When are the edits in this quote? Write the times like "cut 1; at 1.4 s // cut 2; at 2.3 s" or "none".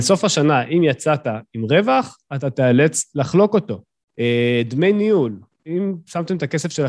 cut 1; at 5.5 s